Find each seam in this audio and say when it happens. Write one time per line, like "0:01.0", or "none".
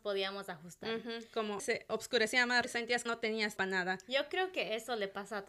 0:01.6
0:02.6
0:03.1
0:03.6